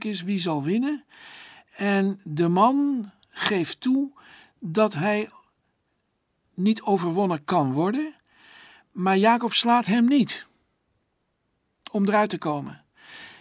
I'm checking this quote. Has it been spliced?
no; 0 cuts

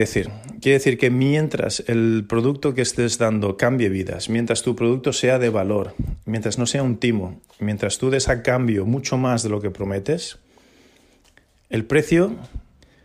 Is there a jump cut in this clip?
no; 0 cuts

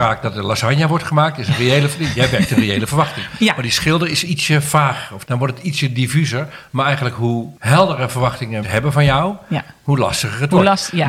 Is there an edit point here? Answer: yes; 3 cuts; at 5.2 s, 7.6 s, 8.6 s

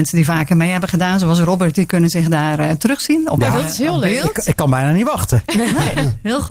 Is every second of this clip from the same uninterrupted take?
yes; 0 cuts

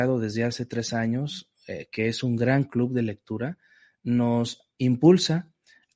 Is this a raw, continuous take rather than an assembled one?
no; 1 cut; at 4.7 s

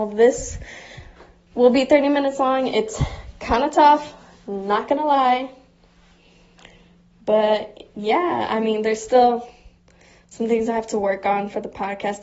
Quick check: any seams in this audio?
no; 0 cuts

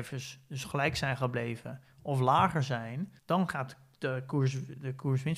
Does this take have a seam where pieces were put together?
yes; 1 cut; at 3.2 s

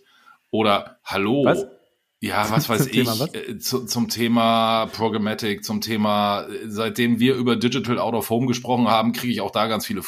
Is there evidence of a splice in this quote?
no; 0 cuts

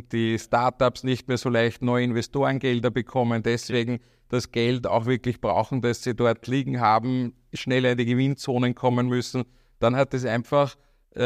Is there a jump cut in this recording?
no; 0 cuts

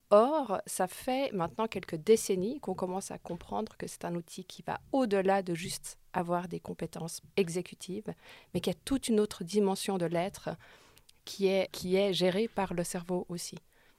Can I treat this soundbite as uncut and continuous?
no; 2 cuts; at 7.3 s, 11.7 s

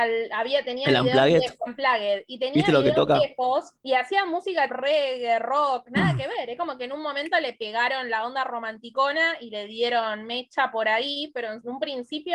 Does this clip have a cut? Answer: yes; 3 cuts; at 1.7 s, 3.8 s, 4.7 s

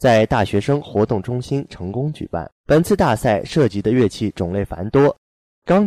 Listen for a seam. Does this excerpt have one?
yes; 1 cut; at 2.6 s

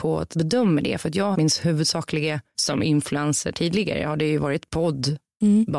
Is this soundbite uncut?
no; 2 cuts; at 1.3 s, 2.5 s

